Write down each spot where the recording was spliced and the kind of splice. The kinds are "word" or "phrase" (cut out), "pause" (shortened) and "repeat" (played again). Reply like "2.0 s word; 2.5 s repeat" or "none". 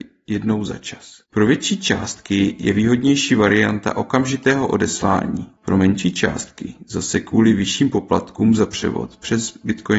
1.3 s pause; 5.6 s pause